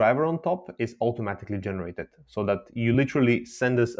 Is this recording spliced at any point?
no; 0 cuts

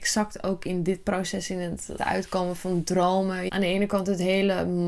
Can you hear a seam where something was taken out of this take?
yes; 2 cuts; at 2.0 s, 3.5 s

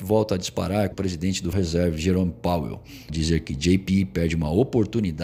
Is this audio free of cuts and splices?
no; 3 cuts; at 0.9 s, 1.5 s, 3.1 s

